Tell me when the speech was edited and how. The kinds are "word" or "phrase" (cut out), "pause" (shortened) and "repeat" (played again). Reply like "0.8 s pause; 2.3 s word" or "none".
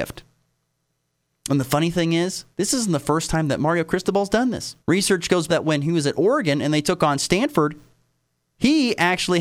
2.5 s pause; 4.8 s pause; 5.5 s phrase